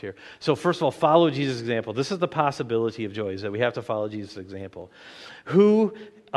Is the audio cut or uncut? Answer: uncut